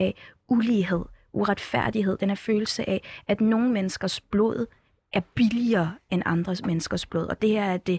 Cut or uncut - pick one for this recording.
uncut